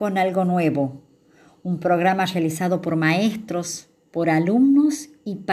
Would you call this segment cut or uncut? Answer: uncut